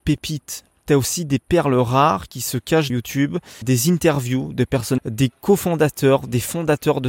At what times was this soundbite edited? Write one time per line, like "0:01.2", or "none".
0:02.9
0:03.6
0:05.0

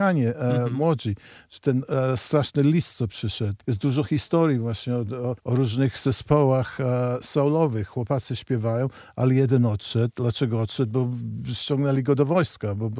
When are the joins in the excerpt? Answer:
0:05.4

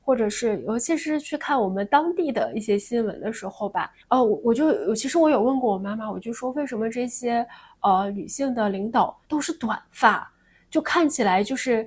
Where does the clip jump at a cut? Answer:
0:04.0
0:09.2

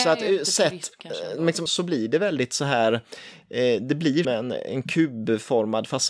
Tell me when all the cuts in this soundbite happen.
0:01.7
0:04.2

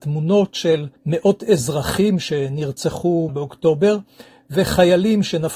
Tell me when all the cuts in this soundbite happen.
0:01.0
0:03.3

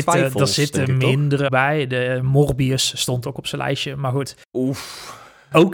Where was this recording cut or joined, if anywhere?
0:01.5
0:04.4

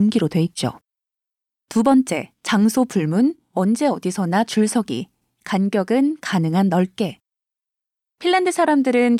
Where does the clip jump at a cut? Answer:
0:02.4

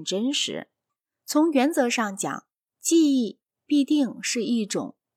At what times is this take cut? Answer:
none

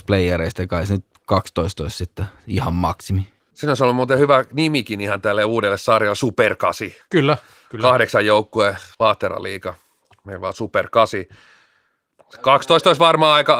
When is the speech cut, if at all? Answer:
none

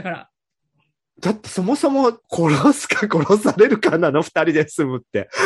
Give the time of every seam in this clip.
0:02.2

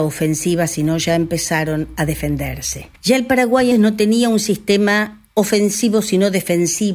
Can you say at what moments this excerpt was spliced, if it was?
0:02.9
0:03.7

